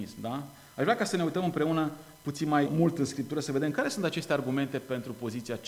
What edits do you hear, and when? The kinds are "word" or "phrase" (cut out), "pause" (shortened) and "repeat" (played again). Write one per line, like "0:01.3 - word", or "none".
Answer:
0:02.7 - word